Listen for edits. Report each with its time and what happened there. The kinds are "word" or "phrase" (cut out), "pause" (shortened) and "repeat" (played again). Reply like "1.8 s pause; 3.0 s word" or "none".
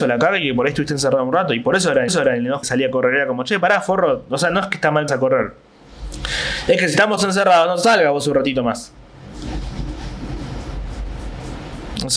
2.1 s repeat; 2.6 s phrase; 5.1 s word; 7.2 s word